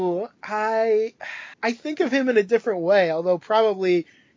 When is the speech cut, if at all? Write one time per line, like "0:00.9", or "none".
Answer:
0:01.5